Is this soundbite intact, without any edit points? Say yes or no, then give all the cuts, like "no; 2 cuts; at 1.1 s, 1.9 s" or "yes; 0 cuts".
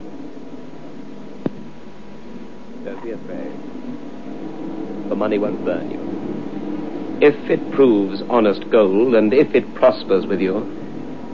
yes; 0 cuts